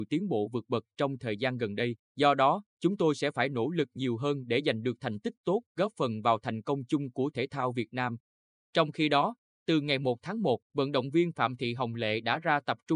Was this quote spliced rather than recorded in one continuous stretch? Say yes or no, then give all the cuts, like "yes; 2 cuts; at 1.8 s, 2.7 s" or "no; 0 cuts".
yes; 4 cuts; at 2.0 s, 2.7 s, 5.7 s, 10.6 s